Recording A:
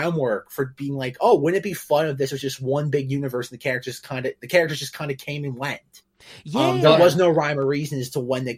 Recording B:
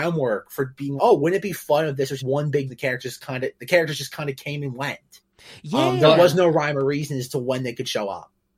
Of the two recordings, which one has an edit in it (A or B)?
B